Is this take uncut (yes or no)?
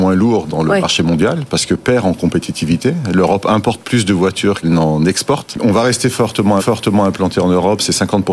no